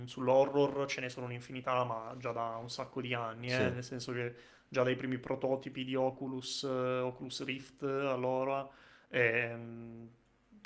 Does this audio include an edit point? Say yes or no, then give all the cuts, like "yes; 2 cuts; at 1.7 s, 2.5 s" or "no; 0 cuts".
no; 0 cuts